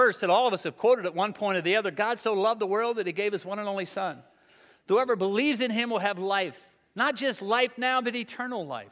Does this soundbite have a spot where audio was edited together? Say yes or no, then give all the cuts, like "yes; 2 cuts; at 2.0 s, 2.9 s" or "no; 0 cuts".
no; 0 cuts